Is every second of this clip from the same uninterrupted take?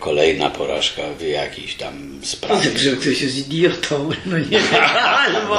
no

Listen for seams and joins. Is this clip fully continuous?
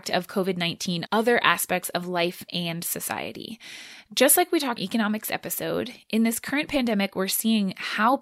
no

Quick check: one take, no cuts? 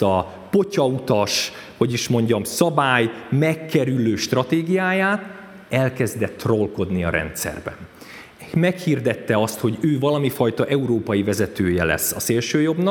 yes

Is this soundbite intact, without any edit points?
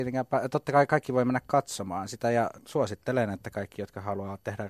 no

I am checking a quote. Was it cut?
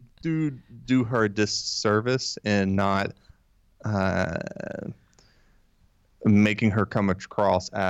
no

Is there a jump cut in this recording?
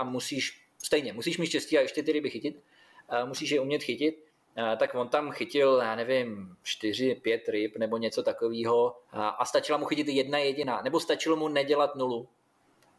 yes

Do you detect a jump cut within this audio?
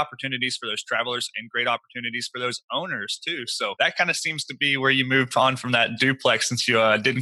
no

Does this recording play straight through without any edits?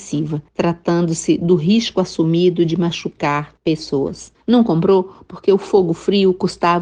yes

